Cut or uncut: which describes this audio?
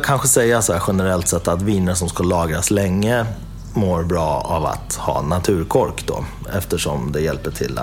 uncut